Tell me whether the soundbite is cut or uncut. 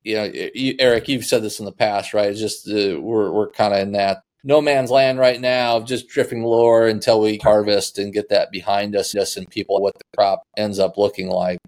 cut